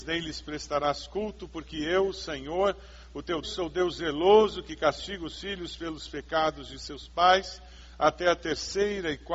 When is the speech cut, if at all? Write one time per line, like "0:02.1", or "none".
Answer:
0:03.4